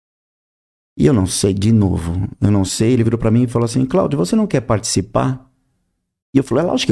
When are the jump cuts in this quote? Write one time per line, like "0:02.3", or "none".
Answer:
none